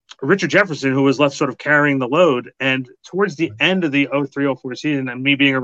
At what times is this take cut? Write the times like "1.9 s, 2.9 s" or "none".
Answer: none

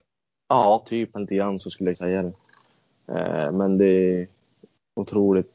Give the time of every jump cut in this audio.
1.1 s, 1.6 s, 1.9 s

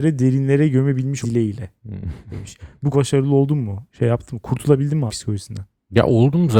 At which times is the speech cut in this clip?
1.2 s, 2.9 s, 5.1 s

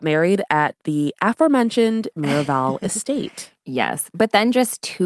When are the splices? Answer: none

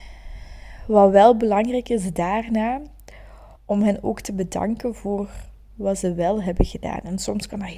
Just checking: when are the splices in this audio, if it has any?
3.6 s

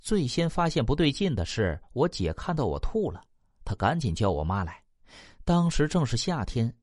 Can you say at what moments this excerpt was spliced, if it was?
none

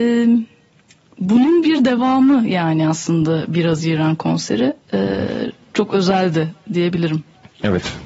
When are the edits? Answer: 5.6 s

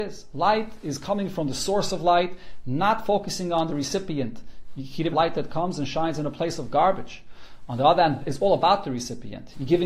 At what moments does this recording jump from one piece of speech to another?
5.1 s, 8.2 s

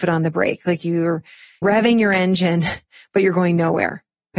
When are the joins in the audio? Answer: 1.6 s

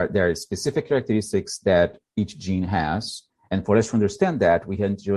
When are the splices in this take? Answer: none

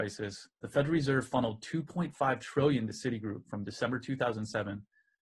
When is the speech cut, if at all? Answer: none

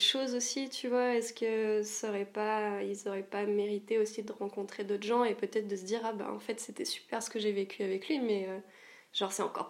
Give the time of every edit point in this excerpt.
none

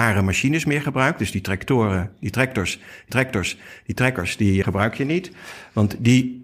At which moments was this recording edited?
3.1 s, 4.6 s

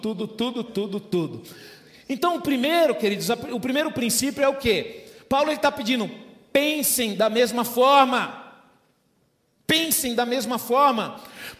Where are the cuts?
none

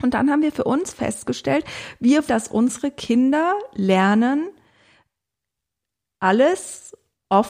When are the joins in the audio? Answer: 2.3 s

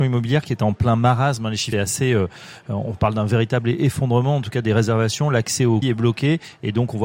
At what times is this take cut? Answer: 1.7 s, 5.8 s

